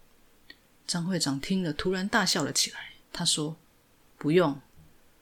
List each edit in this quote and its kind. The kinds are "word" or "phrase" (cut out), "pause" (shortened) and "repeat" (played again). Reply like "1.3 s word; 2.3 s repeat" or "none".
3.0 s pause; 3.6 s pause